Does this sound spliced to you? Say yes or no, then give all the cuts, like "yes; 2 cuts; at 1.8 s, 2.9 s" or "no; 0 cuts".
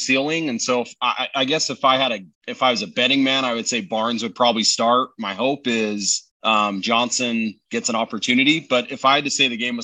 yes; 2 cuts; at 2.3 s, 6.3 s